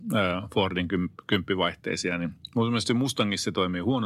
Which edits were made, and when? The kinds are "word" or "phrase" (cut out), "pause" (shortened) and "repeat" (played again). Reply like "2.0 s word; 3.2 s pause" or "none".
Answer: none